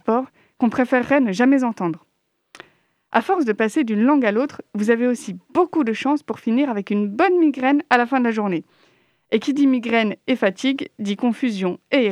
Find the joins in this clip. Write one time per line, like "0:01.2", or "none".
none

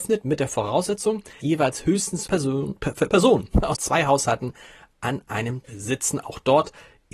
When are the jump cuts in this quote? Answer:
0:01.4
0:02.3
0:03.1
0:03.8
0:05.6

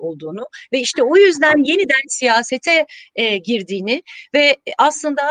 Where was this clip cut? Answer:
none

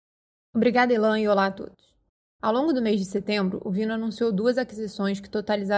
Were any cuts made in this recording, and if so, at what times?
none

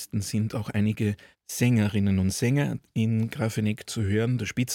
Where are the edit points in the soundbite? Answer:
0:01.3

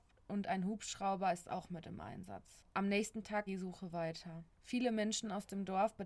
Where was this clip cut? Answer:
0:03.5
0:04.5

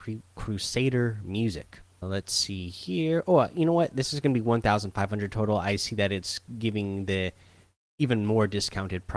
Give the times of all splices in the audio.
0:02.0

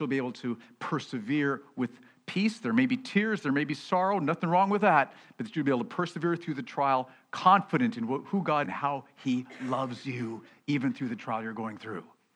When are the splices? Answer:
0:08.6

